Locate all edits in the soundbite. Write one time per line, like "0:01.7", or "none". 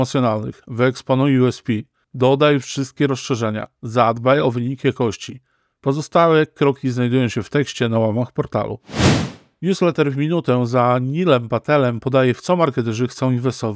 none